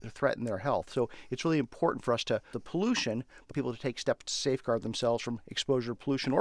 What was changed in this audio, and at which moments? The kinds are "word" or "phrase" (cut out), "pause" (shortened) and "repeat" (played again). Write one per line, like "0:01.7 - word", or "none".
0:02.5 - phrase
0:03.5 - word